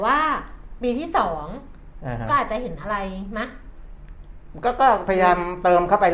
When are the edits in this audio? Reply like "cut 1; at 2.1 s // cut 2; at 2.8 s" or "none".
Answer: cut 1; at 5.1 s